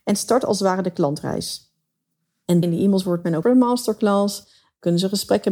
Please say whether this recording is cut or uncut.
cut